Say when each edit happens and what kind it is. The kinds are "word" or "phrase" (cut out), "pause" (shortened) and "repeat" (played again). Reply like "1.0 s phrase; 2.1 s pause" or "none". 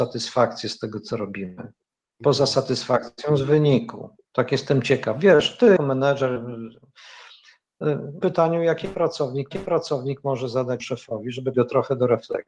1.8 s pause; 4.2 s pause; 5.8 s word; 8.2 s phrase; 9.5 s repeat; 10.8 s word; 11.5 s word